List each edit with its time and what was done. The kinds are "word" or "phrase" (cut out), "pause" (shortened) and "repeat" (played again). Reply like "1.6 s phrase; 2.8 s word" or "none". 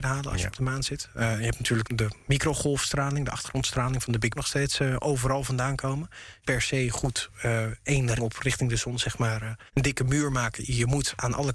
1.8 s word; 4.4 s word; 6.4 s phrase; 8.2 s word; 9.7 s pause

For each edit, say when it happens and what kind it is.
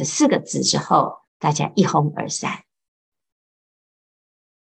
1.3 s pause

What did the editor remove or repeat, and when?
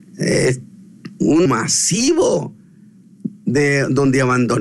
1.5 s phrase

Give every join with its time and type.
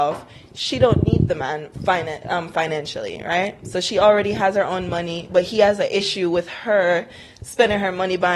none

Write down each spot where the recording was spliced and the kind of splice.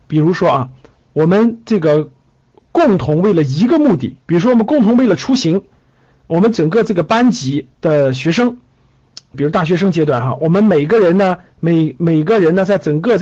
4.2 s pause; 9.3 s phrase

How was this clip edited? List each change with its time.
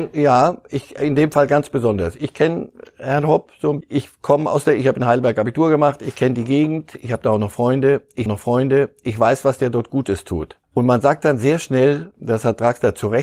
3.8 s word; 8.3 s repeat; 10.6 s pause

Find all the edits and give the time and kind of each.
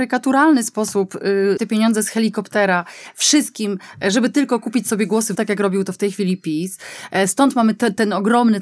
1.6 s word; 5.3 s word

